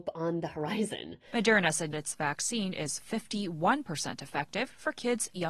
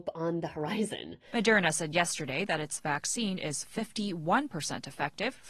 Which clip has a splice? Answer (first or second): first